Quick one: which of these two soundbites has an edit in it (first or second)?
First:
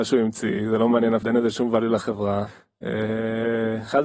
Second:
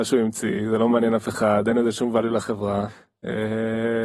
first